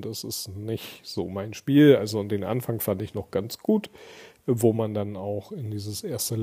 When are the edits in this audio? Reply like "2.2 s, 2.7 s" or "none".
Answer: none